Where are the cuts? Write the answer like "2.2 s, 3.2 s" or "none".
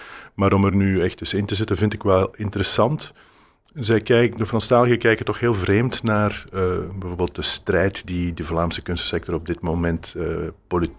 none